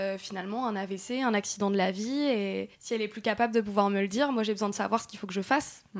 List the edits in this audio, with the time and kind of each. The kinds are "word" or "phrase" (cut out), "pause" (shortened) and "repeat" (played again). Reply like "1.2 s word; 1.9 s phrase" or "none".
2.7 s pause